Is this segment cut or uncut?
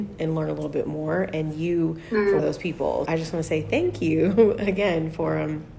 cut